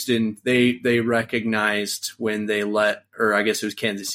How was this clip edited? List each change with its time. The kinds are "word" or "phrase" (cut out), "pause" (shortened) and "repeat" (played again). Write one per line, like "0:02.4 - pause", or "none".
none